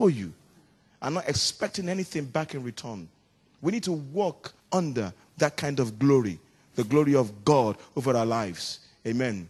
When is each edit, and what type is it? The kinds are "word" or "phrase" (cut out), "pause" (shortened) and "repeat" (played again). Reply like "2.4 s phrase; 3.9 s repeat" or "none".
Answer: 4.6 s pause